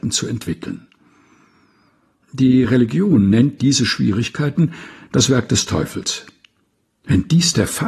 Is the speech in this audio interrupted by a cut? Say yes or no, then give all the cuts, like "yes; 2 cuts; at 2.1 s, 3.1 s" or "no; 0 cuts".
no; 0 cuts